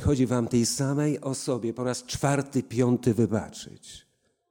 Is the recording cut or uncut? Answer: uncut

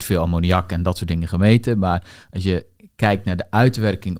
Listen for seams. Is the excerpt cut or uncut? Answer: uncut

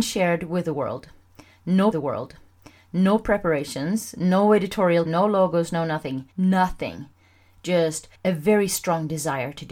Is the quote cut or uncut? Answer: cut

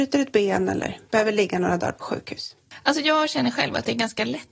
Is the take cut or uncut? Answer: uncut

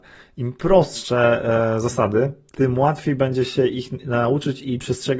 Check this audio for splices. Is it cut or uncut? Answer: uncut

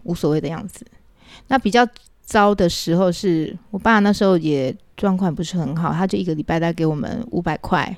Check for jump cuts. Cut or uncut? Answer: uncut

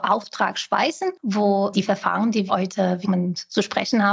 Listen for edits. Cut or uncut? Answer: cut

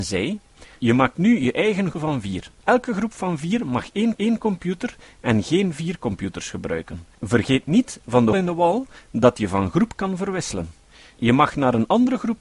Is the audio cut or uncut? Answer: cut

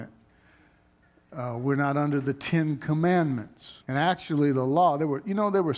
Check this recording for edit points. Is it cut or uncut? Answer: cut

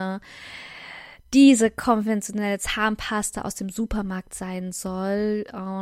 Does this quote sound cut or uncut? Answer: uncut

